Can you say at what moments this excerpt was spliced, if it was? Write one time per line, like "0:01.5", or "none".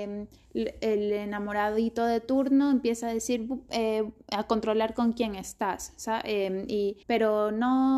0:07.0